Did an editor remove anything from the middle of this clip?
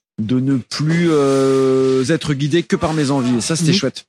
no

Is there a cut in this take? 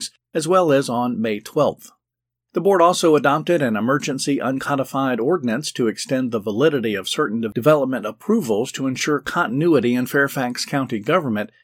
no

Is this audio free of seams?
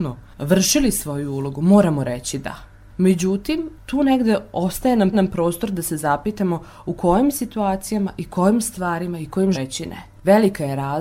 no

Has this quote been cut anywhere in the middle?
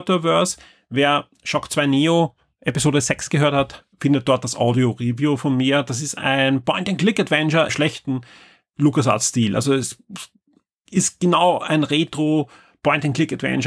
yes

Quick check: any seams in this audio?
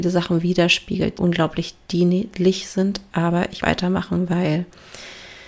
yes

